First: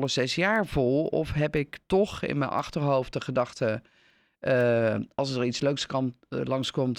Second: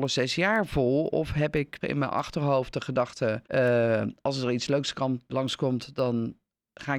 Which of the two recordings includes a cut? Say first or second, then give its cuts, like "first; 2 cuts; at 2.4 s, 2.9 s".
second; 3 cuts; at 1.8 s, 3.4 s, 5.3 s